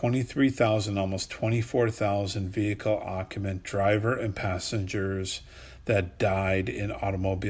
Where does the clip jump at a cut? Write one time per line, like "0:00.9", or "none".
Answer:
none

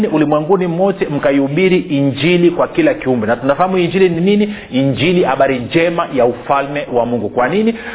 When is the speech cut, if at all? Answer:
none

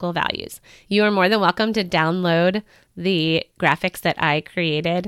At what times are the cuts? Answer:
none

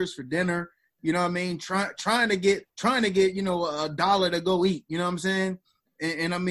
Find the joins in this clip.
0:02.7

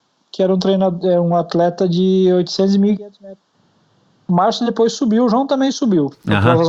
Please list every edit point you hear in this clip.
none

